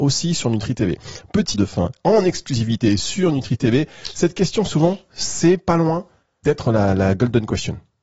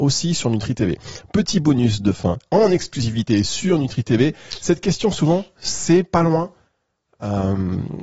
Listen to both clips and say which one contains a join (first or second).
first